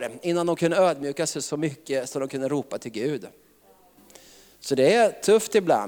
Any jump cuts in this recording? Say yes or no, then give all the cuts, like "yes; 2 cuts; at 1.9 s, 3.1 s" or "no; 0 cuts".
no; 0 cuts